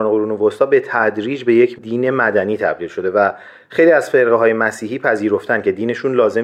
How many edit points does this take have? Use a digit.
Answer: 0